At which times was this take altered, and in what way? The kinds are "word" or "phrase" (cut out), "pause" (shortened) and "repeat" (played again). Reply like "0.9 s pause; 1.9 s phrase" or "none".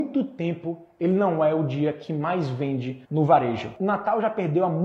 3.0 s pause